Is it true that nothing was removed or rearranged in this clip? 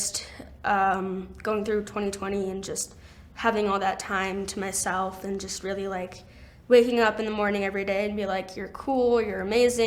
yes; 0 cuts

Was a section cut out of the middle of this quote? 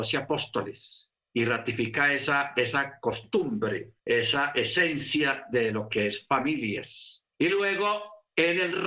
yes; 3 cuts; at 1.2 s, 4.0 s, 7.3 s

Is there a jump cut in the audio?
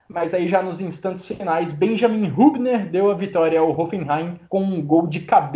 yes; 1 cut; at 4.4 s

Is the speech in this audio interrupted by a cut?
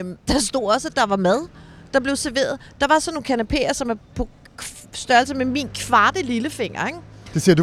no; 0 cuts

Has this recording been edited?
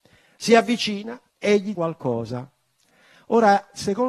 yes; 2 cuts; at 1.3 s, 1.7 s

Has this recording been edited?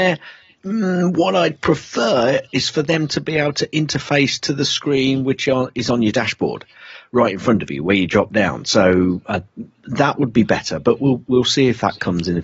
no; 0 cuts

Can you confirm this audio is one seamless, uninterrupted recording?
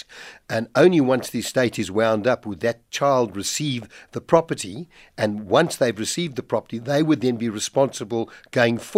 yes; 0 cuts

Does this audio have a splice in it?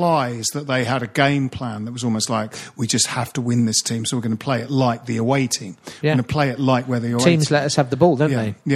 no; 0 cuts

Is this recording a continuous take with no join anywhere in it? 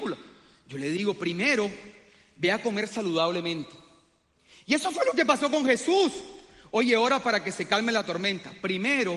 yes; 0 cuts

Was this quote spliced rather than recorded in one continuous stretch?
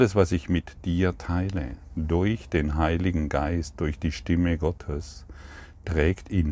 no; 0 cuts

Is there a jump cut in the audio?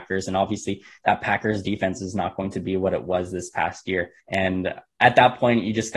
yes; 1 cut; at 4.2 s

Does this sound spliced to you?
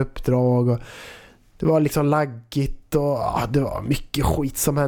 no; 0 cuts

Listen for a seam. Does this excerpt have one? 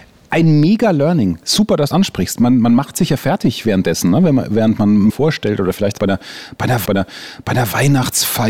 yes; 4 cuts; at 1.9 s, 5.1 s, 6.0 s, 6.9 s

